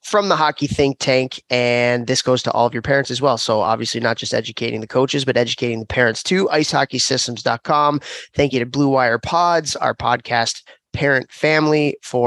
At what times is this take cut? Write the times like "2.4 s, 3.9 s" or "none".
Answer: none